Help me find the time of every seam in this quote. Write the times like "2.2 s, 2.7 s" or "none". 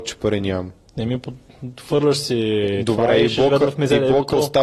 none